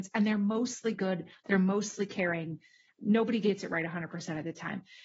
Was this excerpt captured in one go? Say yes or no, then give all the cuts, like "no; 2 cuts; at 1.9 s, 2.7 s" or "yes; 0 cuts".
yes; 0 cuts